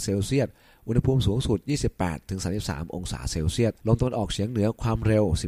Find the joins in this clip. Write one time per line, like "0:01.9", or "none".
0:03.8